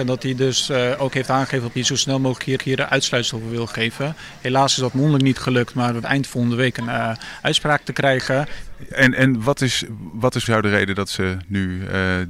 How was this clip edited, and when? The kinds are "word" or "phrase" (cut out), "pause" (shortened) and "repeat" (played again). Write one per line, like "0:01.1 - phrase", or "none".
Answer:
0:01.8 - phrase
0:02.6 - repeat
0:06.0 - phrase
0:10.5 - word